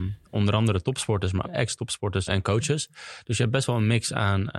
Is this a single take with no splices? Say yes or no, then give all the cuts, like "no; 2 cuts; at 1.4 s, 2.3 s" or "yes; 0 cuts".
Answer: no; 2 cuts; at 1.4 s, 2.3 s